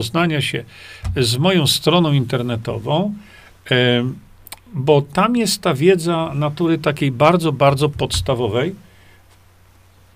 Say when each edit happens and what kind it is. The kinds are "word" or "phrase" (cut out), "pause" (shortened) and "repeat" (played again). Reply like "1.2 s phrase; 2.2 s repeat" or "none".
4.6 s pause